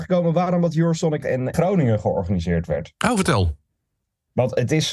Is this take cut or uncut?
cut